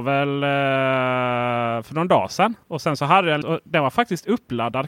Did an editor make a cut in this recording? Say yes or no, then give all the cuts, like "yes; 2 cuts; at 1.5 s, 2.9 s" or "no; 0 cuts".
yes; 2 cuts; at 2.6 s, 3.4 s